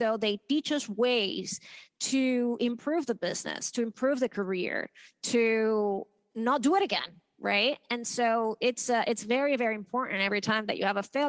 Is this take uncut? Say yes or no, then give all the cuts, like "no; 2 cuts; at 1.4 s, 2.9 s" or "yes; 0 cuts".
yes; 0 cuts